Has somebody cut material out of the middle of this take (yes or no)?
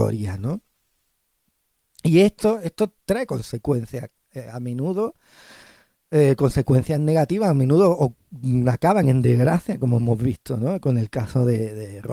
no